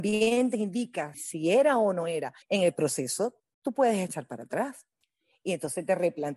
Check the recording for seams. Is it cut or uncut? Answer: cut